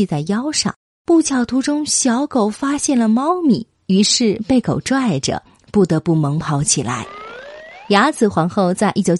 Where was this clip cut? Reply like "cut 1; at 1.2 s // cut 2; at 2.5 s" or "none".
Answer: none